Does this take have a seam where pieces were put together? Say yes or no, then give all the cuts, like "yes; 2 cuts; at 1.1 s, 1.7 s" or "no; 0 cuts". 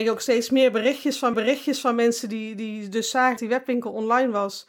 yes; 2 cuts; at 1.3 s, 3.4 s